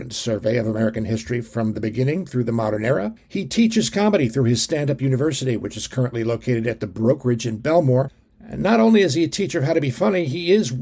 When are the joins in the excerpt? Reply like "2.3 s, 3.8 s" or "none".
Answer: none